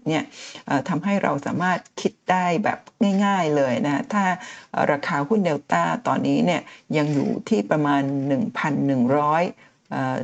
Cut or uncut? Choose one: cut